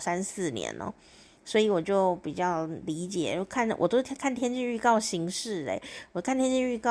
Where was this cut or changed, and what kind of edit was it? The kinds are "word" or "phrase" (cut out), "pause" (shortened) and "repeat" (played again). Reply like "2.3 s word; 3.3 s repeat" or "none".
1.4 s pause